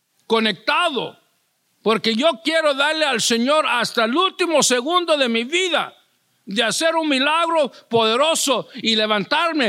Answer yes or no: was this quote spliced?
no